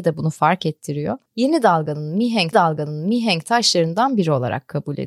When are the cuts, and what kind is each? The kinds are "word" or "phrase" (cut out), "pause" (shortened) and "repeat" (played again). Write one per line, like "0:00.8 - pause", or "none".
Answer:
0:01.3 - pause
0:02.5 - repeat